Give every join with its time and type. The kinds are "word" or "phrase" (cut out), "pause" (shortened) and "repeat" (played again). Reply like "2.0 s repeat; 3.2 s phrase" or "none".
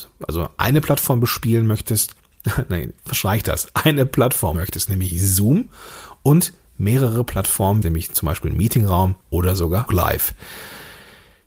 2.2 s pause; 3.0 s pause; 4.5 s word; 7.8 s phrase; 9.2 s pause; 9.9 s word